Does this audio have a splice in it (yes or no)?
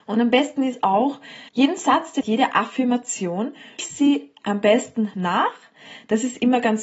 yes